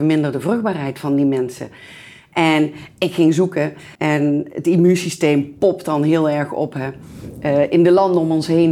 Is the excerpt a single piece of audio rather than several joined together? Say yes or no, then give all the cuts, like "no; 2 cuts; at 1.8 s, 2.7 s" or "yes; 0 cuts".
no; 1 cut; at 3.9 s